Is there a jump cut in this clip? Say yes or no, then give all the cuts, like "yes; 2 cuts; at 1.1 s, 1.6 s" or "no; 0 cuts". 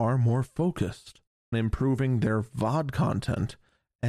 yes; 1 cut; at 1.5 s